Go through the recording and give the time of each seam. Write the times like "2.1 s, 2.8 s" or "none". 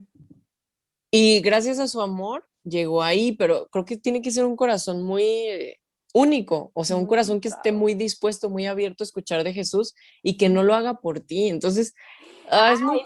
none